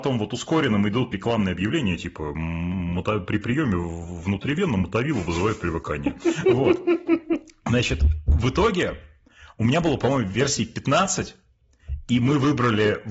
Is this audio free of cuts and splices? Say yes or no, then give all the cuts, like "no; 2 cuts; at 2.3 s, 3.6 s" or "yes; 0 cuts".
no; 1 cut; at 1.1 s